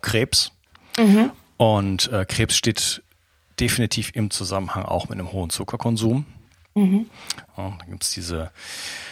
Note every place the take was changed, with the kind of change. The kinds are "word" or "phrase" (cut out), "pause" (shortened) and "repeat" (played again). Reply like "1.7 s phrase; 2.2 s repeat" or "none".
none